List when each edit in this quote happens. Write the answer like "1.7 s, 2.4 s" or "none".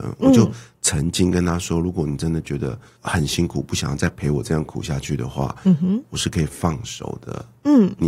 none

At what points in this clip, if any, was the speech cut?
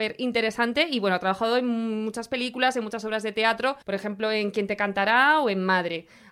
3.8 s

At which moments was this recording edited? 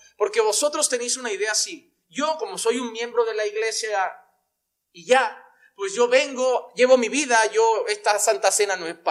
none

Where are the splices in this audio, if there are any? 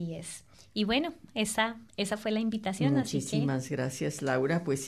none

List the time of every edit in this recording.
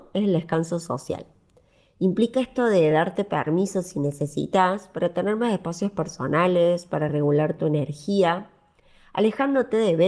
none

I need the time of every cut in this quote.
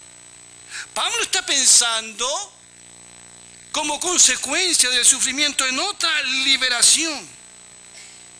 none

